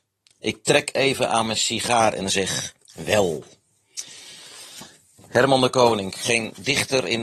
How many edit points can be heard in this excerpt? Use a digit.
1